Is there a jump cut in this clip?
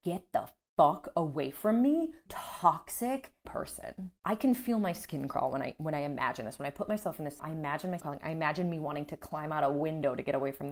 yes; 5 cuts; at 2.3 s, 3.4 s, 4.2 s, 7.4 s, 8.0 s

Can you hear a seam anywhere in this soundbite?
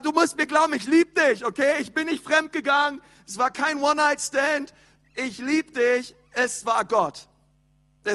no; 0 cuts

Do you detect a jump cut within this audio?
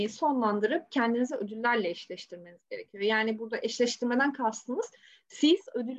no; 0 cuts

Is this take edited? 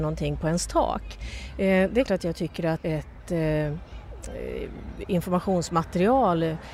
yes; 2 cuts; at 2.1 s, 2.8 s

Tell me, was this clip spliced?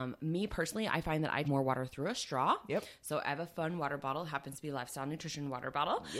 yes; 1 cut; at 1.4 s

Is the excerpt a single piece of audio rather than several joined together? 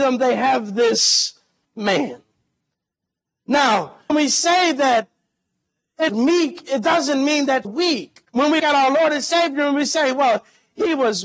no; 6 cuts; at 1.6 s, 4.1 s, 6.1 s, 7.6 s, 8.2 s, 8.6 s

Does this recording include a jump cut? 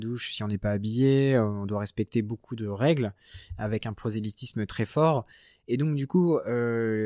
no; 0 cuts

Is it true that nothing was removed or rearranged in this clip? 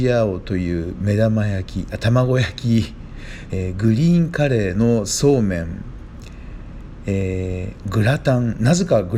no; 1 cut; at 3.5 s

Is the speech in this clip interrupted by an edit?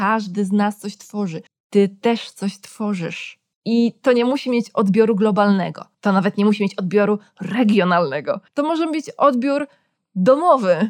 yes; 4 cuts; at 1.5 s, 3.5 s, 5.9 s, 8.5 s

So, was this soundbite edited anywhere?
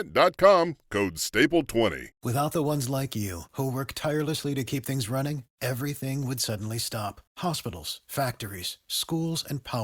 yes; 2 cuts; at 2.1 s, 7.3 s

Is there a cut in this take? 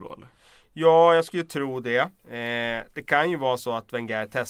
no; 0 cuts

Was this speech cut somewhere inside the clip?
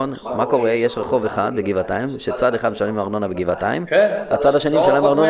no; 0 cuts

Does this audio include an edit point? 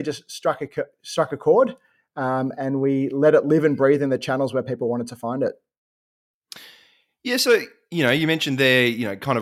no; 0 cuts

